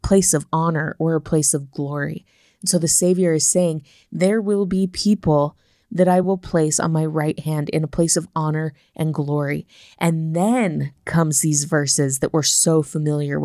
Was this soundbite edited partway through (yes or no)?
no